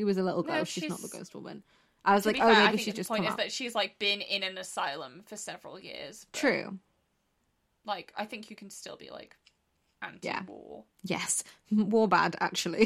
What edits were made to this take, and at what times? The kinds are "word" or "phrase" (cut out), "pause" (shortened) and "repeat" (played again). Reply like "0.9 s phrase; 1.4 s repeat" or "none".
none